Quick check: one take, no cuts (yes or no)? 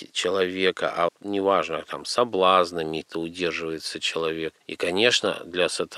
no